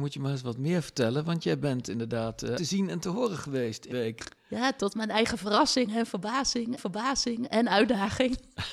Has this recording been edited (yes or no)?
yes